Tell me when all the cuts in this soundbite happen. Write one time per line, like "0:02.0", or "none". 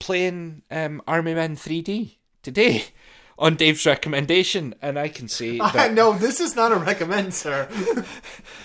none